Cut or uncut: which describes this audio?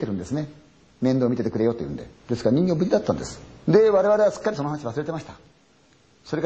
cut